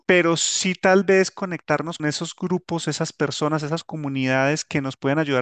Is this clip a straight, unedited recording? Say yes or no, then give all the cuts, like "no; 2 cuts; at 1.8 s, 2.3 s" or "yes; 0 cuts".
no; 1 cut; at 2.0 s